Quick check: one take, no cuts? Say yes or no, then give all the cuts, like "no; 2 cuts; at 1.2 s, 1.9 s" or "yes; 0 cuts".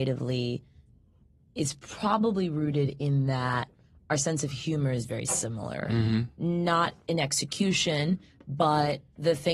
yes; 0 cuts